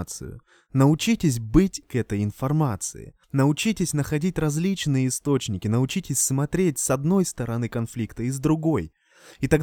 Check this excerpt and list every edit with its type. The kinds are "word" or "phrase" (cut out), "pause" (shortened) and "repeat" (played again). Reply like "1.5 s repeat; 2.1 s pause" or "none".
1.8 s word; 3.2 s pause